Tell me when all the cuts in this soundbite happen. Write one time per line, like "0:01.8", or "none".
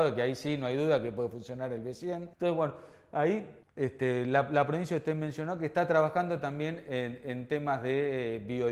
0:02.3
0:03.6